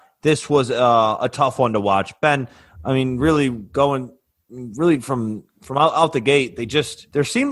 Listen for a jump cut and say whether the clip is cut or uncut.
uncut